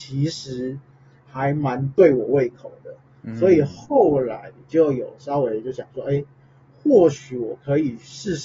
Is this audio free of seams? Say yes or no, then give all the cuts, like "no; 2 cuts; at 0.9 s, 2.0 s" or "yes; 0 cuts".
yes; 0 cuts